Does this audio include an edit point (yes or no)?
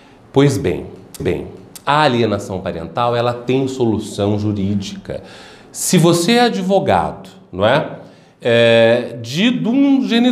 yes